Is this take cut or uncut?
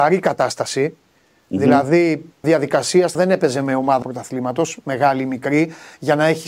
cut